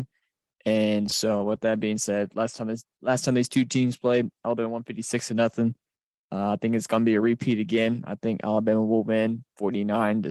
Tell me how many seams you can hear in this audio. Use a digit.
0